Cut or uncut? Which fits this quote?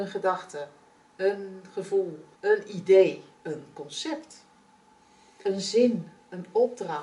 cut